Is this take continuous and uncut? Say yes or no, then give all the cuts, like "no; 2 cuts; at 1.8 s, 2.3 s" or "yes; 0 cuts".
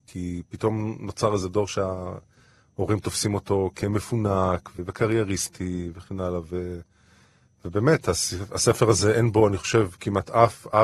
yes; 0 cuts